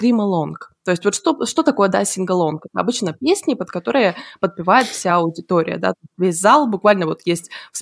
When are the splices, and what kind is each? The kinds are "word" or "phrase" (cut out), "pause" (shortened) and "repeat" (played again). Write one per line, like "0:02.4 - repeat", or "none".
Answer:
none